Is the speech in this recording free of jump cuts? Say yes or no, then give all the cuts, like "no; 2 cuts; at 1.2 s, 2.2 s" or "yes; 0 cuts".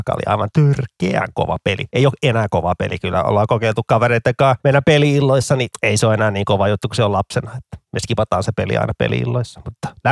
yes; 0 cuts